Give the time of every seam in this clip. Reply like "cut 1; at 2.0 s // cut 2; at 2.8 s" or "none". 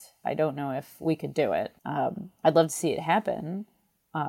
cut 1; at 1.0 s // cut 2; at 1.8 s